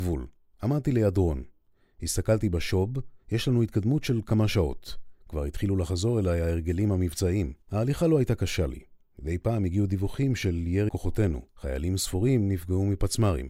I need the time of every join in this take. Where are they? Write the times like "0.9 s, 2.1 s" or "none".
5.2 s, 7.6 s, 10.9 s, 11.5 s